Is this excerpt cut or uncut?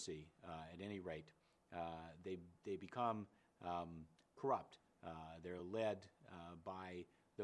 uncut